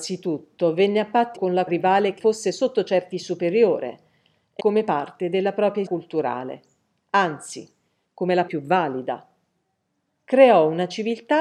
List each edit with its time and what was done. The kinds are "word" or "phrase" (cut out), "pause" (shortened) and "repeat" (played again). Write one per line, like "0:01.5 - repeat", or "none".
0:01.4 - word
0:01.7 - word
0:02.2 - word
0:03.1 - word
0:04.6 - word
0:05.9 - word
0:08.5 - word